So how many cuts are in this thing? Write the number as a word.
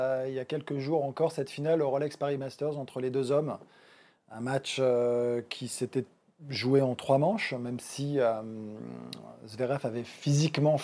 zero